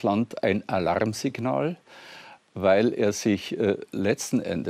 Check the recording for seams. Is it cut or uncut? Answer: uncut